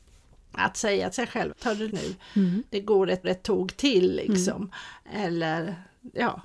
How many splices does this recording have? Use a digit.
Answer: 4